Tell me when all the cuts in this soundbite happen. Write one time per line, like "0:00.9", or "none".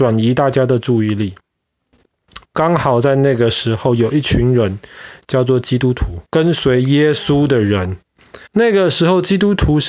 0:06.3
0:08.5